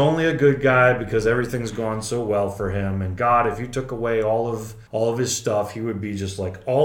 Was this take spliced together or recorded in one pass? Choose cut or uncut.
cut